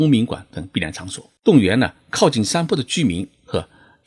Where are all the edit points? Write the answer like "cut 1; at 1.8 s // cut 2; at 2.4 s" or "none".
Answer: cut 1; at 1.4 s